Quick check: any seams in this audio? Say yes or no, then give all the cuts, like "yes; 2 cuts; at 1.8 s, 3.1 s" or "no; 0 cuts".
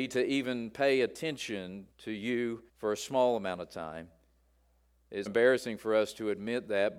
yes; 3 cuts; at 1.9 s, 2.7 s, 5.3 s